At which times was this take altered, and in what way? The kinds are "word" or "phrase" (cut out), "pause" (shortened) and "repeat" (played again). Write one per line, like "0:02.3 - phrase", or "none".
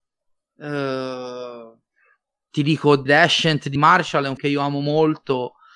0:03.1 - word
0:03.8 - word
0:04.4 - word